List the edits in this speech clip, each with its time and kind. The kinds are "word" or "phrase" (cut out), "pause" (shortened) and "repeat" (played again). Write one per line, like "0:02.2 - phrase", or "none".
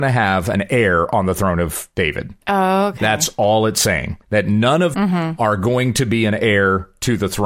0:02.4 - pause
0:04.2 - pause
0:04.9 - phrase